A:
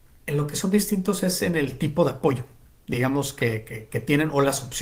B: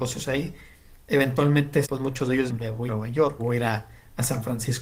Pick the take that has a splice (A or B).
B